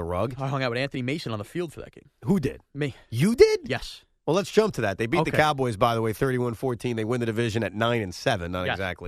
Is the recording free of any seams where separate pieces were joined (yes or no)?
yes